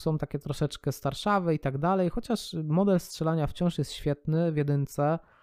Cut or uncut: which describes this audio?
uncut